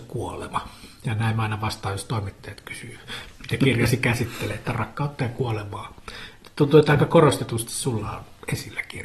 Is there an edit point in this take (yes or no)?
no